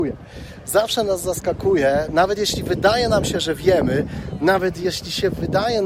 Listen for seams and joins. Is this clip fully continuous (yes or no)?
yes